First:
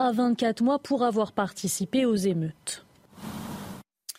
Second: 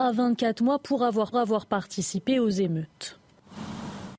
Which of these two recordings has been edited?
second; 1 cut; at 1.3 s

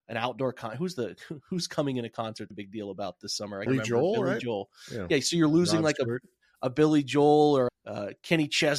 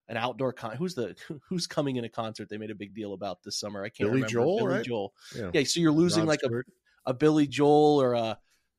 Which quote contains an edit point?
first; 3 cuts; at 2.5 s, 3.7 s, 7.7 s

